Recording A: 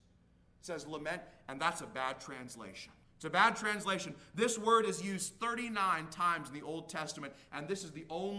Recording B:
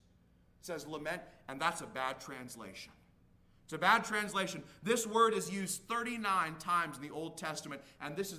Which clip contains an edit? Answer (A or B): A